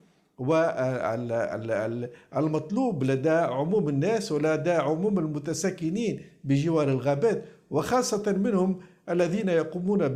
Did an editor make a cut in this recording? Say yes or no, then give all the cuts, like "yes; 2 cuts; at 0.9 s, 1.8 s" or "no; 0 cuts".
no; 0 cuts